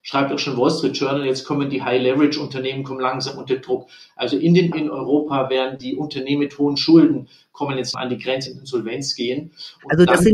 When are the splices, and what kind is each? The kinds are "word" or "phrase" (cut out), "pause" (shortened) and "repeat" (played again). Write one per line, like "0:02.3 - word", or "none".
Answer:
0:04.7 - word
0:07.9 - word
0:08.5 - word